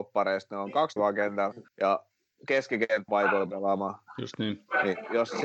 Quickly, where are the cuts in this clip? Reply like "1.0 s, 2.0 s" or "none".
1.0 s, 1.7 s, 3.1 s